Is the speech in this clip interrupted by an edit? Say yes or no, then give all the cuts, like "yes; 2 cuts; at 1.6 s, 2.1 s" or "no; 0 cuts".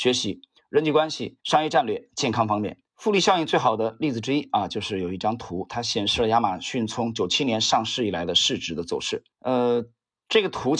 yes; 3 cuts; at 1.4 s, 2.9 s, 9.3 s